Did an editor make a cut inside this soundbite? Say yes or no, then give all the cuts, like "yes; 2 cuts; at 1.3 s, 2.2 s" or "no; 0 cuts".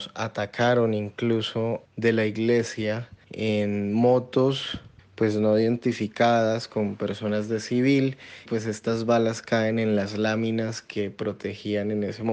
yes; 4 cuts; at 1.9 s, 3.2 s, 5.0 s, 8.5 s